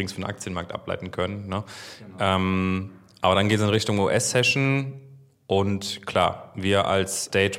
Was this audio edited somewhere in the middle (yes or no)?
no